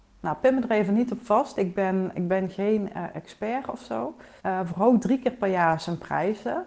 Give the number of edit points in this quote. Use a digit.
1